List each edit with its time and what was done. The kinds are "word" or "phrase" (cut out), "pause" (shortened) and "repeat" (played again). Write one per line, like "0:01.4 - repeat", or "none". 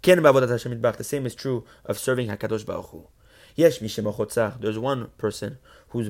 none